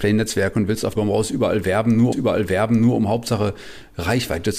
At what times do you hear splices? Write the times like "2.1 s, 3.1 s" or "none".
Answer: 1.0 s, 2.1 s